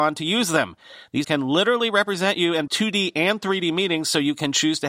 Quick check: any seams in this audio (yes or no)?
yes